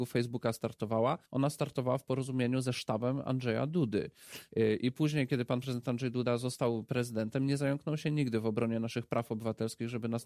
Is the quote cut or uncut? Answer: cut